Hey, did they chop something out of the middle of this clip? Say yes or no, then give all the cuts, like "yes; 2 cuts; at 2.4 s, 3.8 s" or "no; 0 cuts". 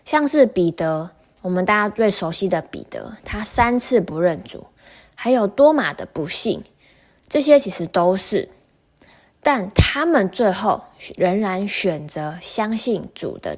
no; 0 cuts